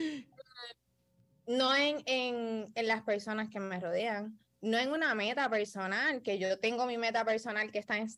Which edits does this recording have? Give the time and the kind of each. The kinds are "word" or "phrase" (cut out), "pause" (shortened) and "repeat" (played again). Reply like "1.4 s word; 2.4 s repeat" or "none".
none